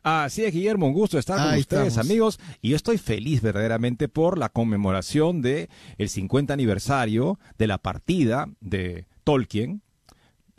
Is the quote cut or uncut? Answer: uncut